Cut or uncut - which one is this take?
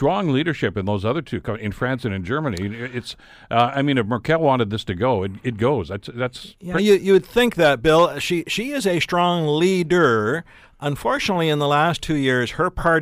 uncut